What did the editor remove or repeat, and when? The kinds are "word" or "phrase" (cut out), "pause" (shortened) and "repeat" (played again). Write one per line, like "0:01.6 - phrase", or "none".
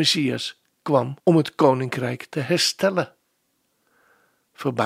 0:01.2 - pause